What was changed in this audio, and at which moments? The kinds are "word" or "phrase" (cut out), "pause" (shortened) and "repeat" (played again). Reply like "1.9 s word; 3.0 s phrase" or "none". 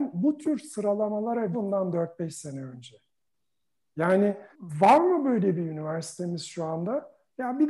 1.5 s phrase; 4.5 s pause